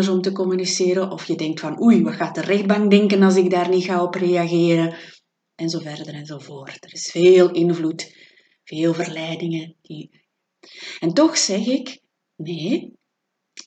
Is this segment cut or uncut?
uncut